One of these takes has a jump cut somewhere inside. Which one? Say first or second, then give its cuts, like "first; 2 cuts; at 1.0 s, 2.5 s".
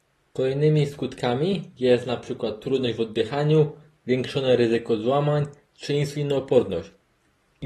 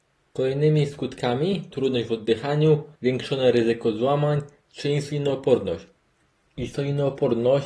second; 2 cuts; at 1.7 s, 3.0 s